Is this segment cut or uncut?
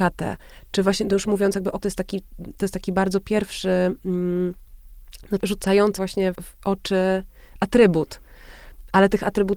cut